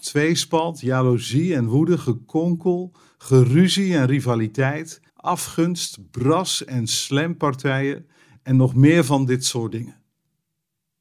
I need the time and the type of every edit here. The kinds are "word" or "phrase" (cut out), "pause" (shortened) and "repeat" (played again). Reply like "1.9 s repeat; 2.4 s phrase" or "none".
5.1 s pause

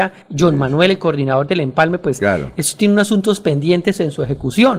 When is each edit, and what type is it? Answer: none

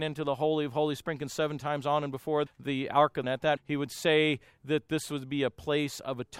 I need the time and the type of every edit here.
2.5 s word; 3.2 s phrase; 3.6 s word

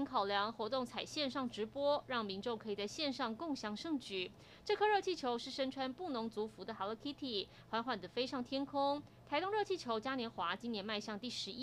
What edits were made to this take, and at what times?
none

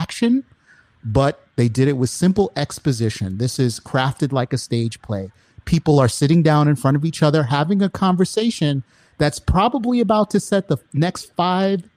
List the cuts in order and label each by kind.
none

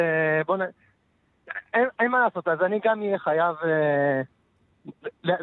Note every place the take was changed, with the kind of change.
none

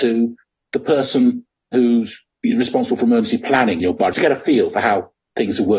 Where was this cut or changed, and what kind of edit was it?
3.8 s word; 4.1 s word

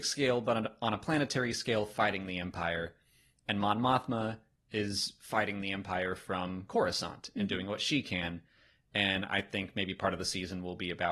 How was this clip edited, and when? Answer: none

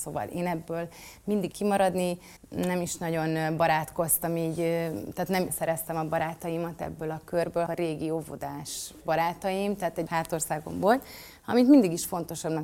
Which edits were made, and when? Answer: 1.5 s phrase; 2.4 s pause; 5.5 s word; 7.7 s phrase; 9.0 s word; 10.1 s phrase

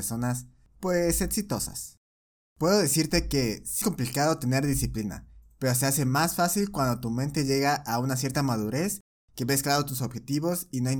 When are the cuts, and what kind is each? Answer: 3.8 s word

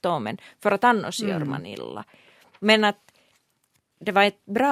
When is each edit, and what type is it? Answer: none

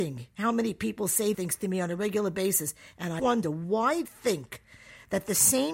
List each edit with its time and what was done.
1.3 s word; 3.2 s word; 4.1 s word

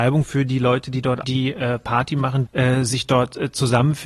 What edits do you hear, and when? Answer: 1.2 s word; 2.5 s phrase

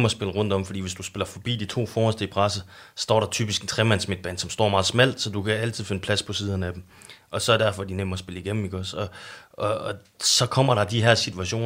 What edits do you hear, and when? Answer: none

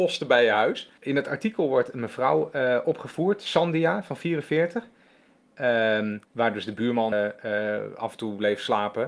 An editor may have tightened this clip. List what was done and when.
1.0 s pause; 6.2 s pause; 7.1 s word

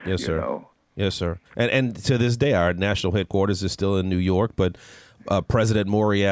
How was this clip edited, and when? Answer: 1.5 s pause

